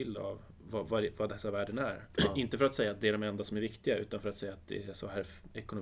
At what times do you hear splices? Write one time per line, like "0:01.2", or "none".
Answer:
none